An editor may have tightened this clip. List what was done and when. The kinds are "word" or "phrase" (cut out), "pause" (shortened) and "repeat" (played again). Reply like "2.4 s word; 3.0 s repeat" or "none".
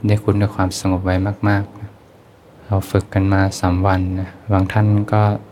2.4 s pause; 4.4 s pause

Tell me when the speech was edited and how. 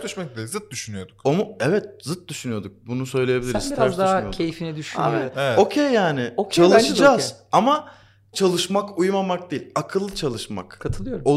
8.3 s word

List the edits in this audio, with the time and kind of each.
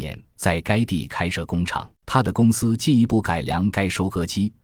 1.9 s pause

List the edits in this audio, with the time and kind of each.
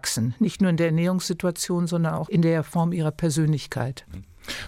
none

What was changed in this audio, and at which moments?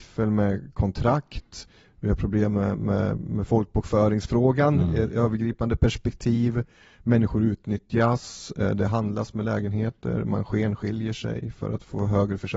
none

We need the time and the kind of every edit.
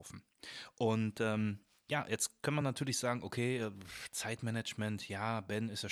none

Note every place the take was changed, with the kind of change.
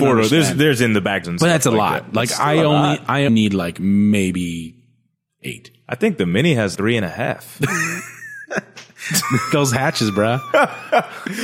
1.2 s word; 3.3 s word; 6.8 s word

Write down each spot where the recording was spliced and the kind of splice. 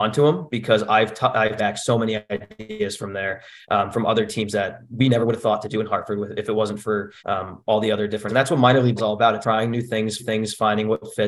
1.6 s word; 7.2 s pause; 8.3 s word; 9.0 s word; 9.4 s word; 10.2 s repeat

